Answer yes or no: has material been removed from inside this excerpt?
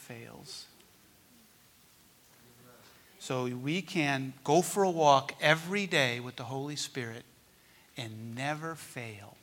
no